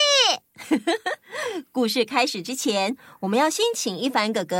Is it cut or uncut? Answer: uncut